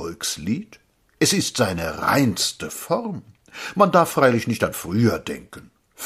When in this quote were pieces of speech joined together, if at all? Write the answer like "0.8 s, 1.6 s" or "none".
none

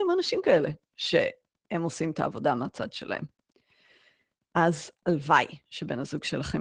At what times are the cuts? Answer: none

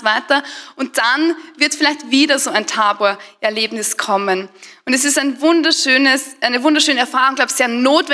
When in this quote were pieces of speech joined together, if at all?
none

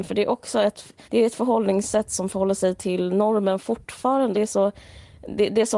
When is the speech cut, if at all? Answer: 1.1 s, 4.3 s

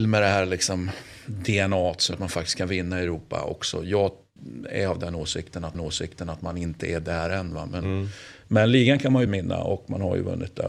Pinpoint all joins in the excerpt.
2.1 s, 5.7 s, 9.3 s

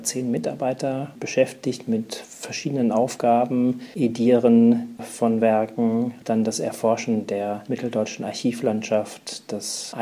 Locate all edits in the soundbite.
none

